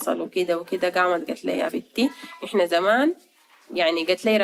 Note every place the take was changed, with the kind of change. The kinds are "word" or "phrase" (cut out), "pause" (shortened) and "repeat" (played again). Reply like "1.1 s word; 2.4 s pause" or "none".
1.5 s word